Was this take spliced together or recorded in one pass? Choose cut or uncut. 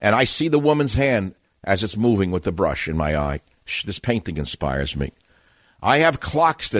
uncut